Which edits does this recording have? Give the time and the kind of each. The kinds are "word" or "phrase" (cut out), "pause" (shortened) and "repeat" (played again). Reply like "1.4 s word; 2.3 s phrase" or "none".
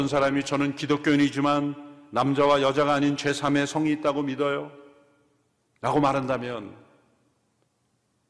none